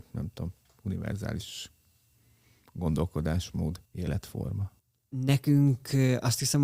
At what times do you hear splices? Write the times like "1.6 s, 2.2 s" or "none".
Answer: 3.9 s